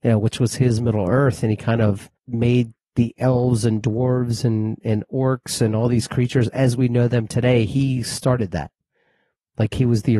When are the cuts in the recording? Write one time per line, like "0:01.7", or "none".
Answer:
0:02.2